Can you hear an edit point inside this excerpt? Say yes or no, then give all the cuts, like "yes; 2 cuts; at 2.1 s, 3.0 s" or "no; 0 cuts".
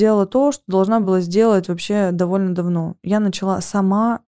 no; 0 cuts